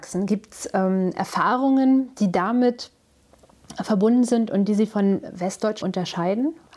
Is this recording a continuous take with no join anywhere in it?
no; 1 cut; at 5.8 s

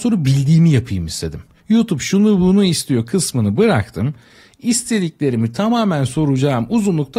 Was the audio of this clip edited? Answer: no; 0 cuts

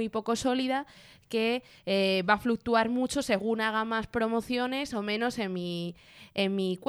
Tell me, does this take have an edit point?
no; 0 cuts

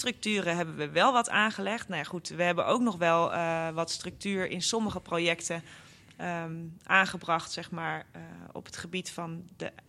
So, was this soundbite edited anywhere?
no; 0 cuts

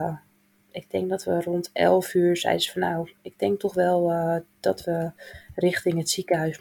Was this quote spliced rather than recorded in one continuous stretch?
yes; 1 cut; at 3.2 s

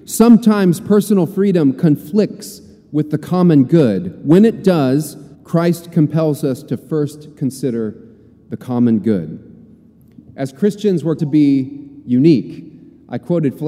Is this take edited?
yes; 2 cuts; at 5.3 s, 11.2 s

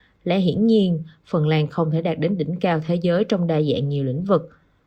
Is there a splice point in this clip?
no; 0 cuts

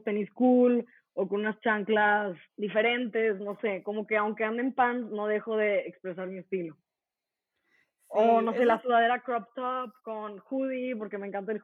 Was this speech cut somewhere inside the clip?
yes; 2 cuts; at 2.5 s, 10.0 s

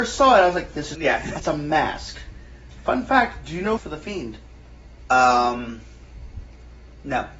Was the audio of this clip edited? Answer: yes; 4 cuts; at 0.9 s, 1.4 s, 2.7 s, 3.8 s

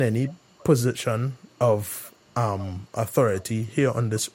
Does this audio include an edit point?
no; 0 cuts

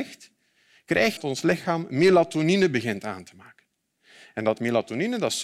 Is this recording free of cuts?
no; 1 cut; at 1.2 s

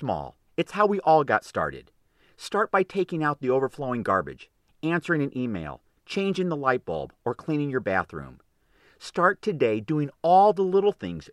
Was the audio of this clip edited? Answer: no; 0 cuts

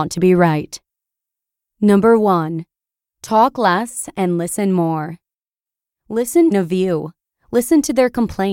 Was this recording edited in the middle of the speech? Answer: yes; 1 cut; at 6.5 s

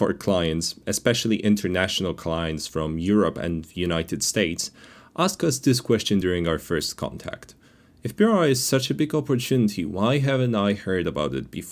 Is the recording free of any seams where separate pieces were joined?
yes; 0 cuts

